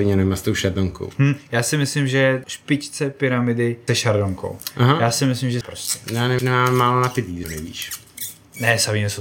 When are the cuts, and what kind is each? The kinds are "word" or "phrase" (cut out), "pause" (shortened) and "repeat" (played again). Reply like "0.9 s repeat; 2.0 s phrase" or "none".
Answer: 2.4 s word; 3.9 s word; 5.6 s phrase; 6.4 s word; 7.4 s word